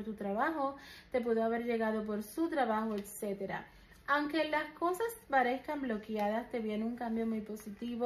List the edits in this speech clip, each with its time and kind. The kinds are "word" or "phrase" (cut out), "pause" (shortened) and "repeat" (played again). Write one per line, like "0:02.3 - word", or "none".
none